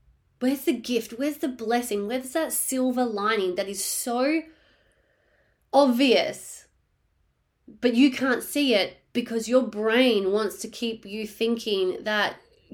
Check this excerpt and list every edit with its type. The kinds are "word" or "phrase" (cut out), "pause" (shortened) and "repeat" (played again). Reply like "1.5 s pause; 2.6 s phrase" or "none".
none